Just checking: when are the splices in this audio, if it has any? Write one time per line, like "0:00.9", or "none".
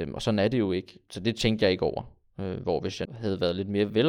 0:03.0